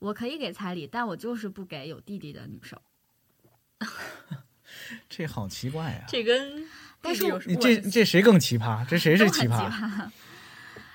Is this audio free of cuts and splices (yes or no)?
yes